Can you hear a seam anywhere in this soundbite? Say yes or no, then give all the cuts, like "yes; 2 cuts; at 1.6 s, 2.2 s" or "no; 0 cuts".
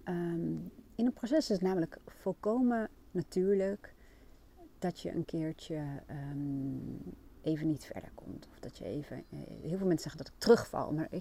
no; 0 cuts